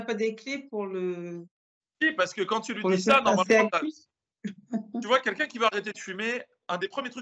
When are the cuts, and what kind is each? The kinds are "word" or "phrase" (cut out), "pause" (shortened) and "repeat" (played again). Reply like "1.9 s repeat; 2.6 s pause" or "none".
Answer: none